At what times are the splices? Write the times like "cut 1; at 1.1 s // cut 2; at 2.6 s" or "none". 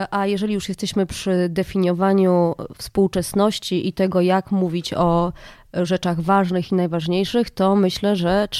none